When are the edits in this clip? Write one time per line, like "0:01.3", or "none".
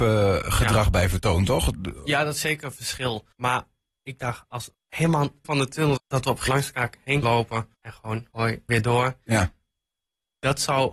0:03.3
0:04.7
0:05.4
0:06.0
0:06.5
0:07.2
0:07.7
0:08.3
0:08.7